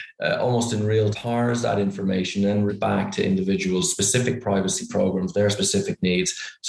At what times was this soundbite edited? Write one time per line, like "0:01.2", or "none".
0:01.1
0:02.7